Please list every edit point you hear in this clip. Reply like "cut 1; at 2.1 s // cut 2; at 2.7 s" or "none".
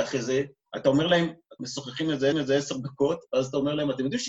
cut 1; at 1.6 s // cut 2; at 2.3 s